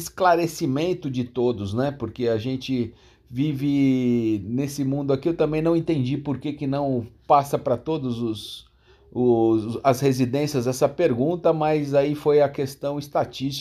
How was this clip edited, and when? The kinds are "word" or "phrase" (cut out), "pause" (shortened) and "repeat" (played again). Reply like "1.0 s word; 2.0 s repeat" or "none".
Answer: none

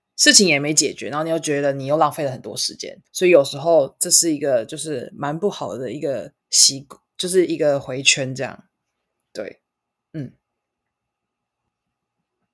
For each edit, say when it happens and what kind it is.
3.1 s pause; 6.4 s pause; 10.0 s pause

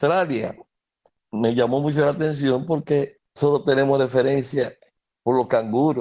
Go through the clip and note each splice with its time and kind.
3.4 s phrase

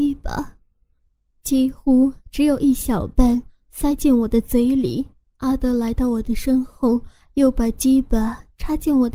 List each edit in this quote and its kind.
5.2 s pause

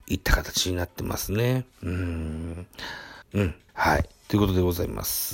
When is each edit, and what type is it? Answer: 3.2 s pause; 3.7 s pause

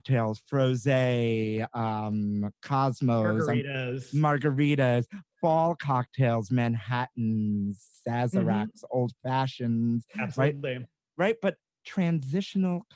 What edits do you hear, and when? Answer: none

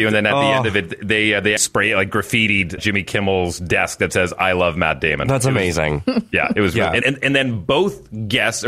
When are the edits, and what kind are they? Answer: 1.6 s word; 2.8 s word; 7.0 s word

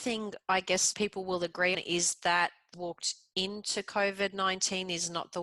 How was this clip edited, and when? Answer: 0.9 s word; 1.7 s word; 2.7 s phrase

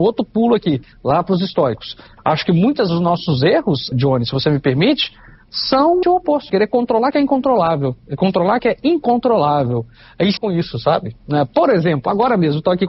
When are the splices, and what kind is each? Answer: 2.9 s word; 3.9 s word; 6.0 s word; 6.5 s word; 7.1 s word; 8.6 s word; 10.4 s word

